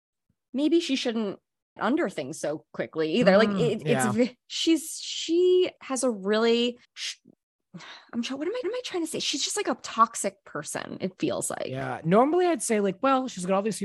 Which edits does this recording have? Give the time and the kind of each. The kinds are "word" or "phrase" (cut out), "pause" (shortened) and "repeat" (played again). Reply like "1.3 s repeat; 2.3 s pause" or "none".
1.8 s word; 5.8 s pause; 6.8 s pause; 8.6 s repeat